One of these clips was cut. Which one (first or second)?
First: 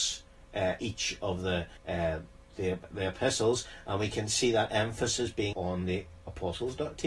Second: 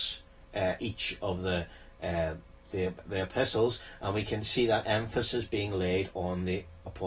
first